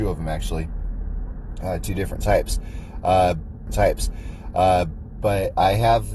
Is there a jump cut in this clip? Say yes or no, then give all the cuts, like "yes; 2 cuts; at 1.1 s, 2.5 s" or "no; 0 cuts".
yes; 1 cut; at 3.7 s